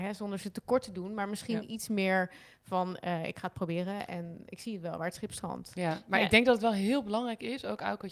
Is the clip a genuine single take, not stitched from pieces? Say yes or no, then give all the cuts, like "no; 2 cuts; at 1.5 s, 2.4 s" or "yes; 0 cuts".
yes; 0 cuts